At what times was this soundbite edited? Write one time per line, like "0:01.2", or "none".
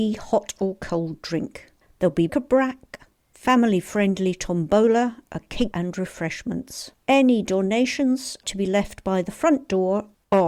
0:02.3
0:05.7
0:06.9
0:08.4

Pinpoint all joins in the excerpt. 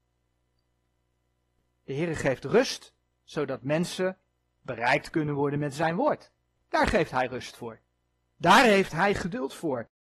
none

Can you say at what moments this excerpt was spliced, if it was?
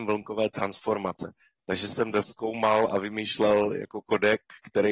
0:02.2

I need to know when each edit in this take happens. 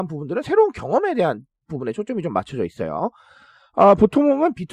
none

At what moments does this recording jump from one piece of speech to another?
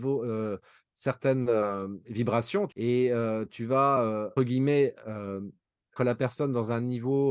0:02.7
0:04.4
0:06.0

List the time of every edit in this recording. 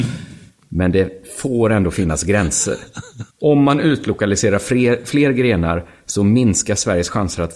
0:03.3

